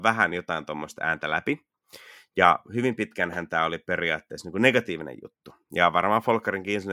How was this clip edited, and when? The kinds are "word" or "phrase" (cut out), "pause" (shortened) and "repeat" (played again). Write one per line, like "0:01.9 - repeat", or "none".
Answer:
none

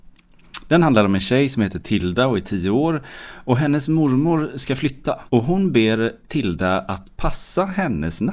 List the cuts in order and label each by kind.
0:05.3 - pause

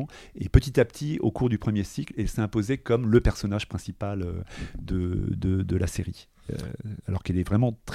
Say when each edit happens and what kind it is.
none

